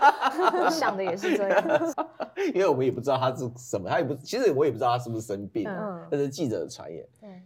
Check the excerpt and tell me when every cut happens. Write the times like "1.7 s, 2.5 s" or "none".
1.9 s